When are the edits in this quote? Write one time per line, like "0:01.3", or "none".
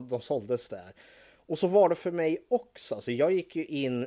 none